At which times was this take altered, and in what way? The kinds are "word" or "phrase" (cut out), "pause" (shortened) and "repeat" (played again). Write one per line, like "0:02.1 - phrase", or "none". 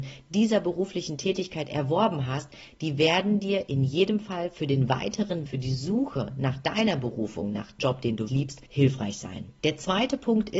0:05.5 - phrase
0:07.8 - word
0:08.3 - word
0:08.7 - pause
0:09.6 - pause